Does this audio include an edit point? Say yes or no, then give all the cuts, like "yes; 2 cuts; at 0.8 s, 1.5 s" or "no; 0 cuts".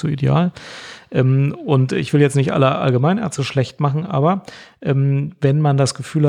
no; 0 cuts